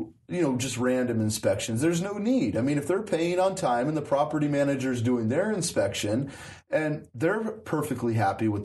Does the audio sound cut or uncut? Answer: uncut